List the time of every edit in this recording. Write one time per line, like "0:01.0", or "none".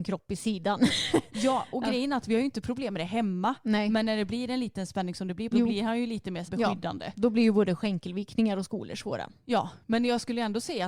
0:05.5
0:06.5